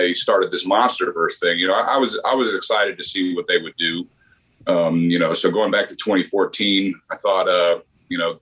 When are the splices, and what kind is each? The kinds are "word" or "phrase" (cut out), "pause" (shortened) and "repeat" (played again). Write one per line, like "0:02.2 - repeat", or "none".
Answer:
none